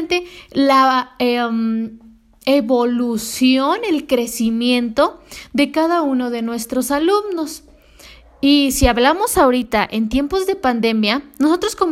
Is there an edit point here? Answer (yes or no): no